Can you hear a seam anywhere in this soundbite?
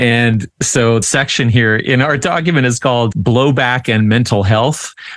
yes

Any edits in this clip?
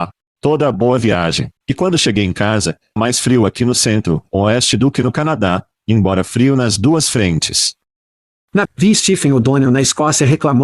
yes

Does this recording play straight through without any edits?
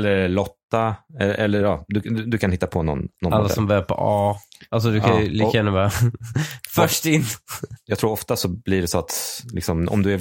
yes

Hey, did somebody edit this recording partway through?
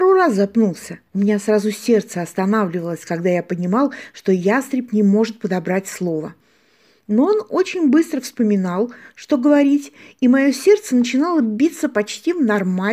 yes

